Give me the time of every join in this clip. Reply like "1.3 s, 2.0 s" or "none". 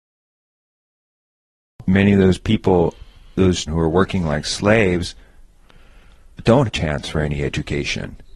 3.7 s, 6.7 s